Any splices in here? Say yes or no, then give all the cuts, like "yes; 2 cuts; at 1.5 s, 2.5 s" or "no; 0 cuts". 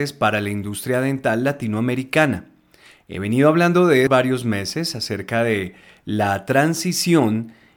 yes; 1 cut; at 4.1 s